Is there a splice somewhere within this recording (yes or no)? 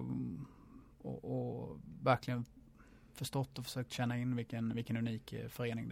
no